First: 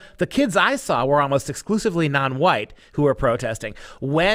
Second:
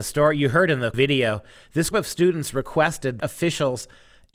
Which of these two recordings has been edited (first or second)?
second